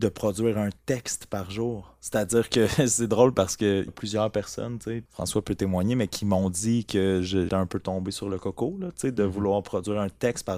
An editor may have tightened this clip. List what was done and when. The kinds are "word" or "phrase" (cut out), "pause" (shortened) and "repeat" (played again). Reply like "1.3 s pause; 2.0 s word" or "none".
3.9 s word; 5.1 s word; 7.5 s word